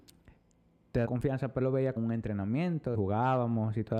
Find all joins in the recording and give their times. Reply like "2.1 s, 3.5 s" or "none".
1.0 s, 1.6 s, 2.0 s, 2.9 s